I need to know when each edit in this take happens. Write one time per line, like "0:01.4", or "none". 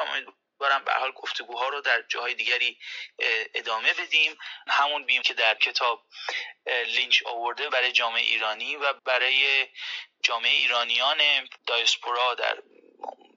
0:04.7
0:05.2
0:05.6
0:07.7
0:09.0
0:11.6